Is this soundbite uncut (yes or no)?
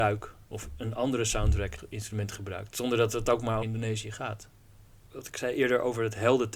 no